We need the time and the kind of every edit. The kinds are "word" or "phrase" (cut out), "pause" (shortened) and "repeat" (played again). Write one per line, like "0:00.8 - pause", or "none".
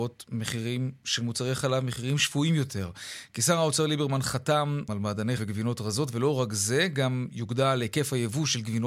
0:04.9 - phrase
0:05.4 - phrase